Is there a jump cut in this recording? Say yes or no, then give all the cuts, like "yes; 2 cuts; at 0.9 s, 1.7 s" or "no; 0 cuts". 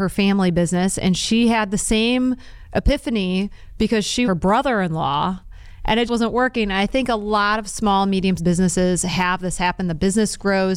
yes; 3 cuts; at 4.2 s, 6.1 s, 8.4 s